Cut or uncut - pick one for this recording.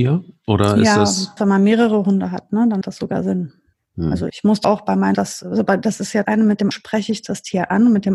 cut